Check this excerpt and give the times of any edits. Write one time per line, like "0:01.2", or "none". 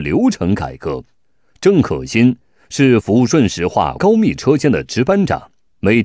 none